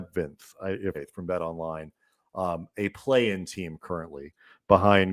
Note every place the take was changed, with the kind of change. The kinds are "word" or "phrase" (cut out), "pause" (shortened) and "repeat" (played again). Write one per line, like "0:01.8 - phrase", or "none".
0:00.9 - phrase